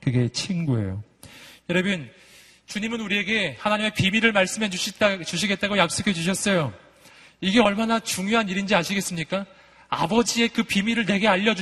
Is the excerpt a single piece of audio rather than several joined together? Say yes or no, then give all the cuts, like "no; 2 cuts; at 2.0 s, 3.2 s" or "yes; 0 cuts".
yes; 0 cuts